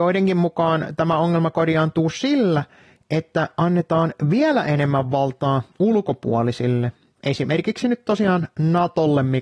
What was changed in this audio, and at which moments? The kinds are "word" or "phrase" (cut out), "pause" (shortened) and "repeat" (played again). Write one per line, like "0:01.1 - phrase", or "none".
none